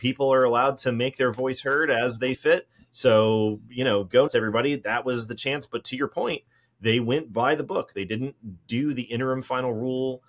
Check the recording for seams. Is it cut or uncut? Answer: cut